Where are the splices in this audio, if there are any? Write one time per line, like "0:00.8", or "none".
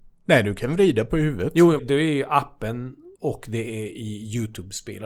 0:01.8
0:03.1